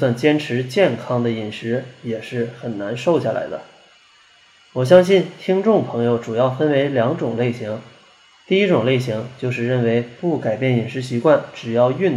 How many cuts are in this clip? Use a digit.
0